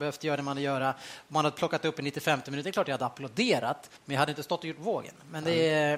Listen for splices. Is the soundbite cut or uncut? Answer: cut